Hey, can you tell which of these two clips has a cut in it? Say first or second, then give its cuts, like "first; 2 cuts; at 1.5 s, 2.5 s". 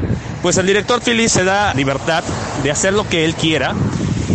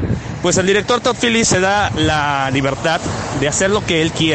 first; 2 cuts; at 1.0 s, 1.7 s